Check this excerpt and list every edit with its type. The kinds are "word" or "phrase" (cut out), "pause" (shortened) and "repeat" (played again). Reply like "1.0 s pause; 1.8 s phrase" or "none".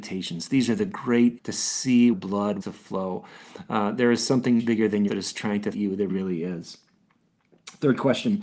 1.4 s word; 2.1 s phrase; 2.6 s word; 4.6 s word; 5.1 s word; 5.7 s word; 6.1 s word

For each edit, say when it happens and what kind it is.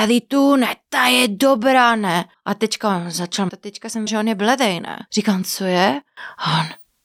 2.3 s pause; 3.5 s word; 4.1 s word; 5.1 s pause

